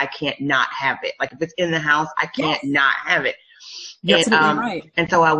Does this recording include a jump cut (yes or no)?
yes